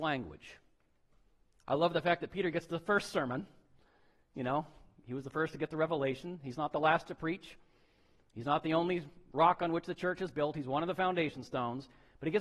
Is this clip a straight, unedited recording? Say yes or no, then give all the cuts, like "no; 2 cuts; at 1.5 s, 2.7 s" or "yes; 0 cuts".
yes; 0 cuts